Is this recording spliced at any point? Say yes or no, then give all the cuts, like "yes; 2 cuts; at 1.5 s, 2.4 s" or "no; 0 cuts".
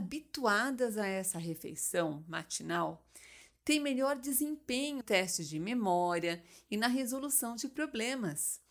yes; 1 cut; at 5.0 s